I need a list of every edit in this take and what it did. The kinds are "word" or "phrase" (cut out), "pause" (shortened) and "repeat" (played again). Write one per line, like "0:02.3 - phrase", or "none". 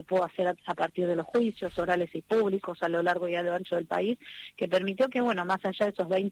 none